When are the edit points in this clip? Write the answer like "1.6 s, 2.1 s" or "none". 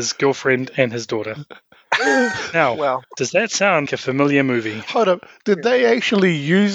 3.0 s, 3.9 s

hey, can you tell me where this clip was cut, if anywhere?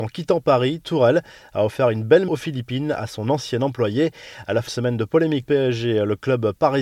2.3 s, 4.7 s, 5.4 s

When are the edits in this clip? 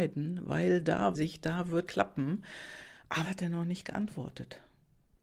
1.1 s, 1.9 s, 3.2 s

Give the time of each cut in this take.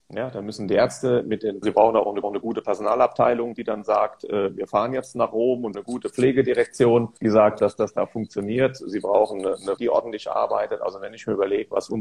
1.6 s, 2.2 s, 5.7 s, 7.2 s, 7.6 s, 9.8 s

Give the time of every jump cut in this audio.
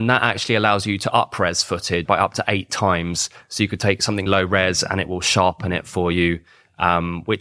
2.1 s, 4.3 s

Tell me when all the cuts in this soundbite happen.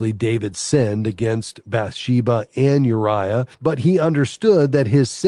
3.5 s

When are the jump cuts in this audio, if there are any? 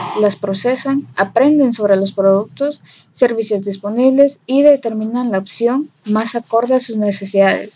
none

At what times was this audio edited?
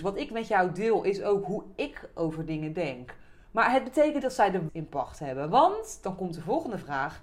4.2 s, 4.7 s

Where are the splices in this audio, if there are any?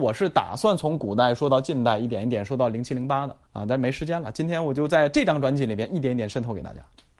3.5 s

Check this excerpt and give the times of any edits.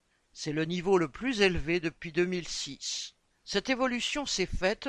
3.3 s

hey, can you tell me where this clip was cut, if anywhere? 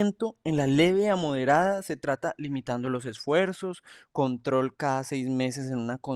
none

